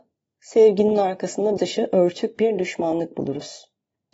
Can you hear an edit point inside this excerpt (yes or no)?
yes